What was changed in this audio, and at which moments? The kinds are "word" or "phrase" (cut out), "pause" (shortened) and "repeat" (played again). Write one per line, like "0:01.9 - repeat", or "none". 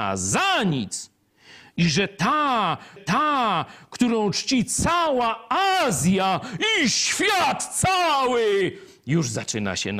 0:03.0 - repeat